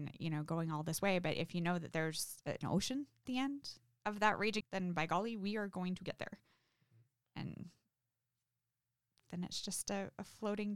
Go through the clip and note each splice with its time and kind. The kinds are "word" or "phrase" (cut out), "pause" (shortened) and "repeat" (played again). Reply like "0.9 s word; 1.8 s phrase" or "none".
3.2 s word; 4.6 s word